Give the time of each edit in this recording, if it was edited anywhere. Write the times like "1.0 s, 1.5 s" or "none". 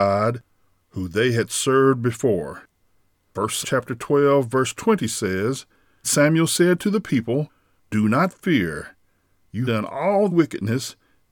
3.6 s, 6.0 s, 9.6 s, 10.3 s